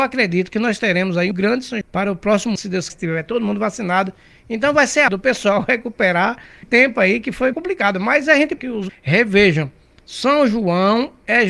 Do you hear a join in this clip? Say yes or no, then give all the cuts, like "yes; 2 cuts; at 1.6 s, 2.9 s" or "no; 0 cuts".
yes; 9 cuts; at 1.3 s, 1.8 s, 2.6 s, 2.9 s, 5.1 s, 6.6 s, 7.5 s, 8.6 s, 8.9 s